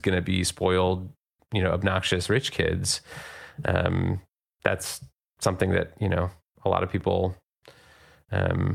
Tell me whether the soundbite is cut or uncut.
uncut